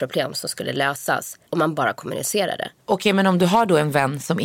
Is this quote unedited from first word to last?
no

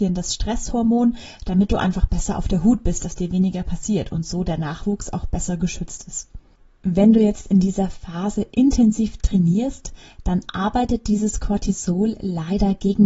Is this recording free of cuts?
yes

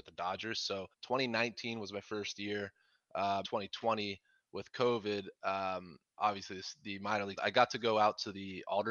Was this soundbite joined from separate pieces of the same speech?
yes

